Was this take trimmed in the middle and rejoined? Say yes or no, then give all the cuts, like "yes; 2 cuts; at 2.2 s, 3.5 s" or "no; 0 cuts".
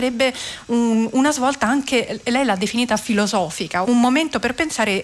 yes; 1 cut; at 3.8 s